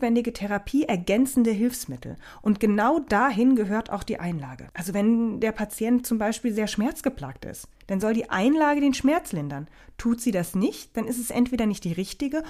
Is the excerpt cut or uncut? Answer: cut